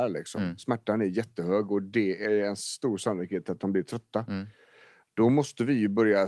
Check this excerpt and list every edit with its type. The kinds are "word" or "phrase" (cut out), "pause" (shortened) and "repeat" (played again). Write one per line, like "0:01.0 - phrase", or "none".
none